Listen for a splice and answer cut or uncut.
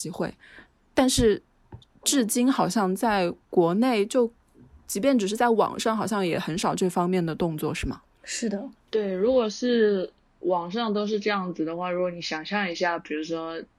cut